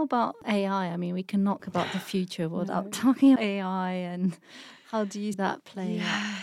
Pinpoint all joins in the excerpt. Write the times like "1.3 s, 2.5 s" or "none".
1.6 s, 3.4 s, 5.3 s